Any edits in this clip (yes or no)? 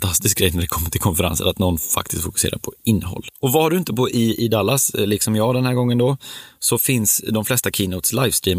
no